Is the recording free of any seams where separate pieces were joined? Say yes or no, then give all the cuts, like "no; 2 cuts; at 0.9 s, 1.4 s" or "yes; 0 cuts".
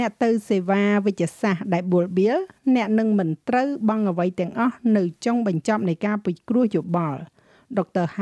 yes; 0 cuts